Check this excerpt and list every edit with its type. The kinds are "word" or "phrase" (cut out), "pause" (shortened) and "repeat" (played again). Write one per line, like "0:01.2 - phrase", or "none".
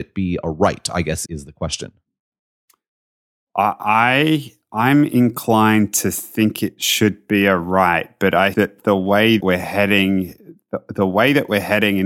0:01.2 - word
0:08.5 - word
0:09.4 - word